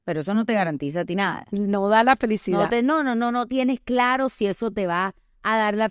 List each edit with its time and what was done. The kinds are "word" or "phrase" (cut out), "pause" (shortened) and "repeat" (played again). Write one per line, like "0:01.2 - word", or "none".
none